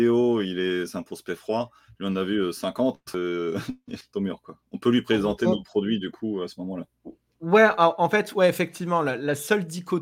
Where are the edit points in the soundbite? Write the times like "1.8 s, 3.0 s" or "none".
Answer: 4.1 s